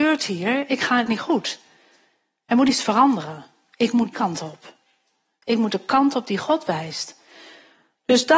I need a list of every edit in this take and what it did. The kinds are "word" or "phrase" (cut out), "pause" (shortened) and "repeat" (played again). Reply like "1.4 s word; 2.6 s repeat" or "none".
1.1 s phrase; 4.1 s word